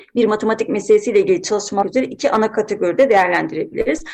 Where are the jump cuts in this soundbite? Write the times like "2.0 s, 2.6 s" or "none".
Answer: 1.8 s